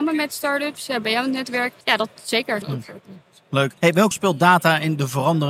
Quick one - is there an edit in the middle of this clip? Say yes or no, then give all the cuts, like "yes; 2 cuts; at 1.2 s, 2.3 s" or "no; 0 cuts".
yes; 5 cuts; at 1.0 s, 1.8 s, 2.6 s, 3.8 s, 4.1 s